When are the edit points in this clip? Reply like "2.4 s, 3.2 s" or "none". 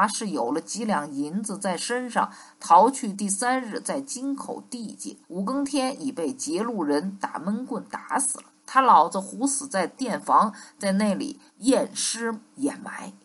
5.2 s, 11.5 s

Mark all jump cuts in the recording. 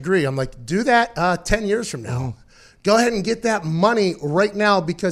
none

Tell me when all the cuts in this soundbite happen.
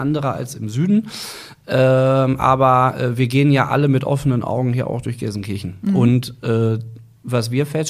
none

